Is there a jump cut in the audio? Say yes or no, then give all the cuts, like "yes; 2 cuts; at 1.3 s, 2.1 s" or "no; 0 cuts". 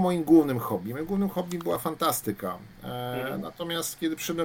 no; 0 cuts